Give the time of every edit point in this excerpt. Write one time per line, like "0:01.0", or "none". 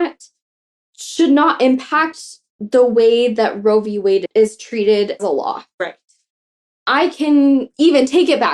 0:05.2